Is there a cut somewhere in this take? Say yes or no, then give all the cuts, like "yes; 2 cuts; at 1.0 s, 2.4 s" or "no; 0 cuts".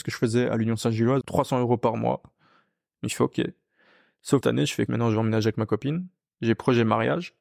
yes; 3 cuts; at 1.2 s, 4.4 s, 4.9 s